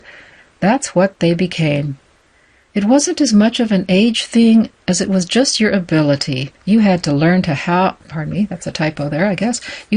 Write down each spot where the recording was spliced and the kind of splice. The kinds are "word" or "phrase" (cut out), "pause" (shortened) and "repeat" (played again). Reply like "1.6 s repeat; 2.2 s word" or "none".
2.2 s pause; 6.6 s pause; 8.0 s pause